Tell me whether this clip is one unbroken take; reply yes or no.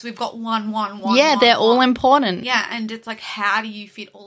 yes